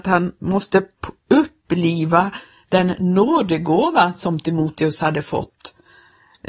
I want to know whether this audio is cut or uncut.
uncut